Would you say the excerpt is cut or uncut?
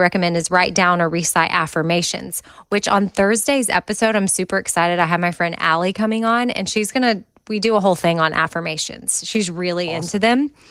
uncut